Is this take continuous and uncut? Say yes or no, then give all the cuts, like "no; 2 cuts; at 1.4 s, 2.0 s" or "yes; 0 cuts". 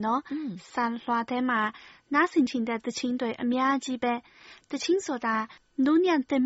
no; 1 cut; at 5.6 s